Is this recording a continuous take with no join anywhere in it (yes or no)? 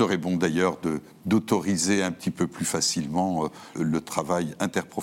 no